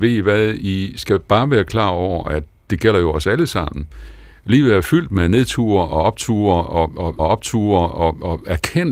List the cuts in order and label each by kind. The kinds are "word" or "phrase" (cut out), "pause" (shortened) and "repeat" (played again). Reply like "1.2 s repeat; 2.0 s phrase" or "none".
7.2 s repeat